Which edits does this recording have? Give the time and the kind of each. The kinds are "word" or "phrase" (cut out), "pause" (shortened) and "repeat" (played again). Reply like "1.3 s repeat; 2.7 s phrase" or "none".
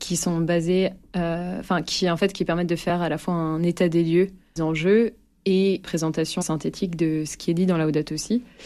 4.6 s word; 5.8 s word; 6.4 s word